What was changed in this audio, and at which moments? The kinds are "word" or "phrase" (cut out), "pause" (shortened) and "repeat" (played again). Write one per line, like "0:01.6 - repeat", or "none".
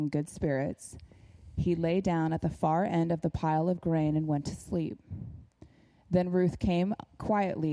none